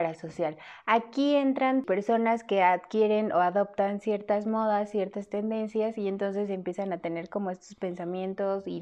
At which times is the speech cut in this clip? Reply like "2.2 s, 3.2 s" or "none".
none